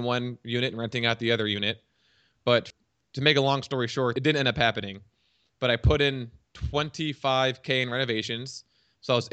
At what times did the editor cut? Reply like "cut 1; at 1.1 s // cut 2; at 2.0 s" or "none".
none